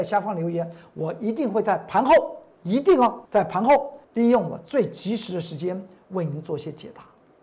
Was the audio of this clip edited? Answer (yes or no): yes